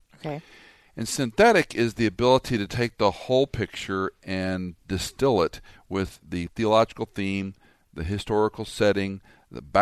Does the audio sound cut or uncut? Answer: uncut